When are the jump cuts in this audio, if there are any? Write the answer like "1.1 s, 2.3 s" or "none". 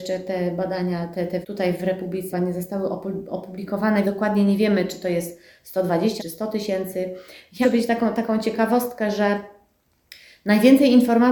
1.4 s, 2.3 s, 4.0 s, 6.2 s, 7.6 s